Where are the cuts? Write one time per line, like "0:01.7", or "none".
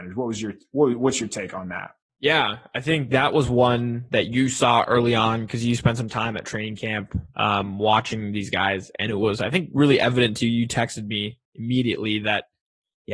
0:02.1